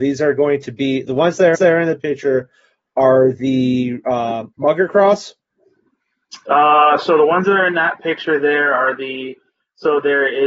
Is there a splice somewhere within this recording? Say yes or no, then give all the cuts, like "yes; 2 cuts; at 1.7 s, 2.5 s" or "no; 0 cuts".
yes; 1 cut; at 1.5 s